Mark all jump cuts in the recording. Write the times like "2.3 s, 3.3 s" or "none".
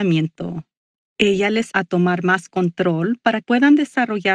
1.7 s, 3.4 s